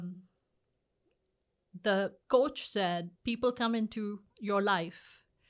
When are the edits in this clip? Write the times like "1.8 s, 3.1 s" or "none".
2.2 s, 3.1 s, 4.3 s